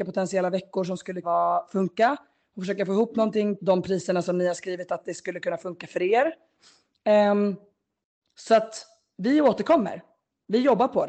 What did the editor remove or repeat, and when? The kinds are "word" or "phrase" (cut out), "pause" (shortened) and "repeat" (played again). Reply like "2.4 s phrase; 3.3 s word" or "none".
1.2 s word; 3.6 s word